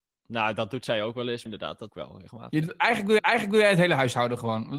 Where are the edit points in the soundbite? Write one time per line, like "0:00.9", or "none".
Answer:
0:01.5
0:01.9
0:03.2